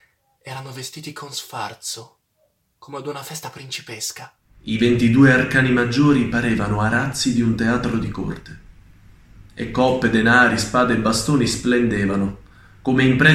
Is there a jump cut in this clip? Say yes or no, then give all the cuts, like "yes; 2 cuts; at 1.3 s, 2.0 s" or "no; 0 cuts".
no; 0 cuts